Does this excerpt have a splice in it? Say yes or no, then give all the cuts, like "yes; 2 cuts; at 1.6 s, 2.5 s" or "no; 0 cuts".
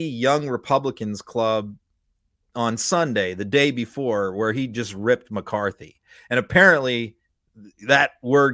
no; 0 cuts